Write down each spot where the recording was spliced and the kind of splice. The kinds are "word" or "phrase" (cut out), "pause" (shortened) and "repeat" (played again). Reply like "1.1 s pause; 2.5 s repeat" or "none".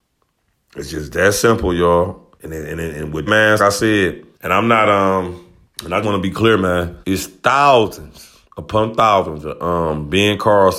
2.4 s pause; 3.3 s word; 3.6 s phrase; 4.3 s pause; 5.6 s pause; 6.0 s word; 7.0 s pause; 8.4 s pause